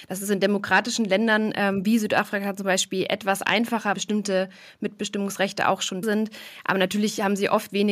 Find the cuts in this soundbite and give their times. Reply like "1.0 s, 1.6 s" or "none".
3.9 s, 6.0 s

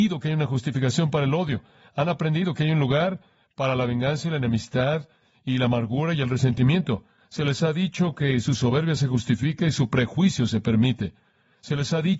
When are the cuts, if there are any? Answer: none

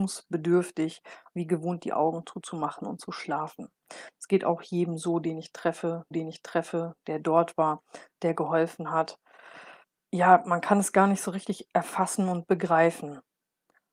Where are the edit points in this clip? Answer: 1.3 s, 6.1 s, 9.8 s

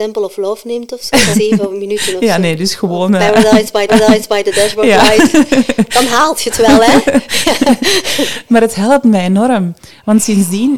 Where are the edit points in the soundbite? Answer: 1.3 s, 3.9 s

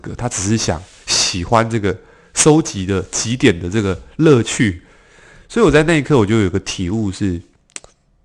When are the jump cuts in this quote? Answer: none

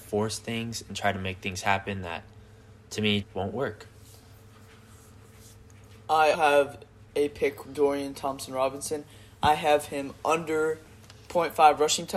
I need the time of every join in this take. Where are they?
3.2 s, 6.3 s, 7.6 s

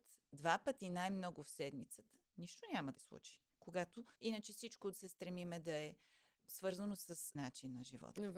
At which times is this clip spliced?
2.9 s, 4.2 s, 4.9 s, 6.4 s, 7.4 s

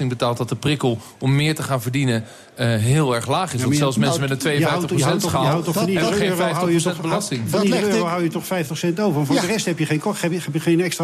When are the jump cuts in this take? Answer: none

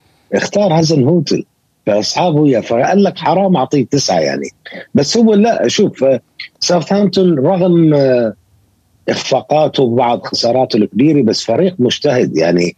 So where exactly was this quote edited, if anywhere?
none

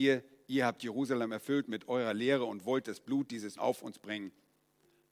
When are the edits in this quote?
3.6 s

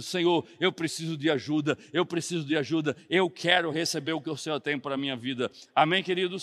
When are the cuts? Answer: none

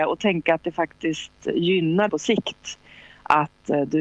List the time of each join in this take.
2.1 s

